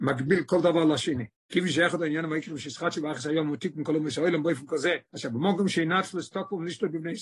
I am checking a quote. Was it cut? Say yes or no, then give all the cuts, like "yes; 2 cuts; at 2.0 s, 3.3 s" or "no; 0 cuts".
yes; 2 cuts; at 1.3 s, 5.0 s